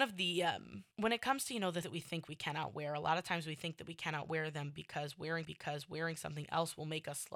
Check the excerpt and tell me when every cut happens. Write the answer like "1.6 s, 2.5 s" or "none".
0.9 s, 1.8 s, 5.4 s